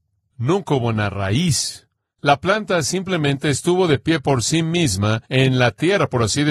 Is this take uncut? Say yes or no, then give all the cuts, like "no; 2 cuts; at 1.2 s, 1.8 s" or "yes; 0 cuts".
no; 1 cut; at 5.3 s